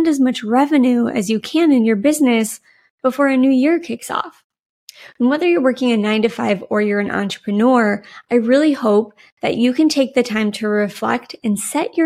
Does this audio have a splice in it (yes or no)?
no